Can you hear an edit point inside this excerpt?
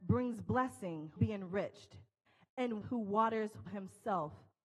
yes; 3 cuts; at 1.2 s, 2.8 s, 3.7 s

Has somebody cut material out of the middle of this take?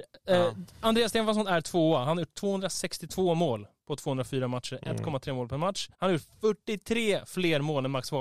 yes; 1 cut; at 5.9 s

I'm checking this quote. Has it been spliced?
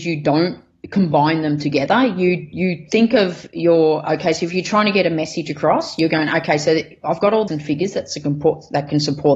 yes; 1 cut; at 7.5 s

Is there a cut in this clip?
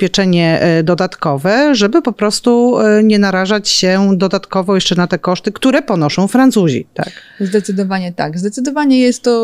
no; 0 cuts

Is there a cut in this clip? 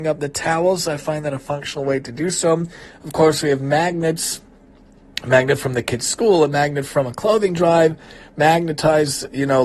no; 0 cuts

